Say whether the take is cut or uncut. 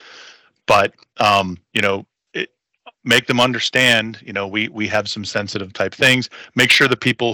cut